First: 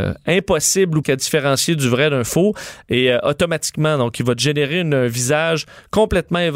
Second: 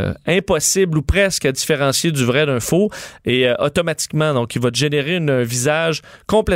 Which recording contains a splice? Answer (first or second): first